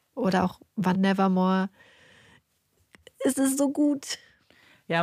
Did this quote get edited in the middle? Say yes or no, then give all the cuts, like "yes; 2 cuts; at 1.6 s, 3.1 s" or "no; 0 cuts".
yes; 1 cut; at 0.9 s